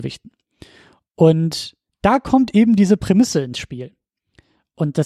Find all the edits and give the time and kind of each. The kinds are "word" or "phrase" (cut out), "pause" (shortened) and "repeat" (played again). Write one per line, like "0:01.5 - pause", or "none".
0:01.9 - pause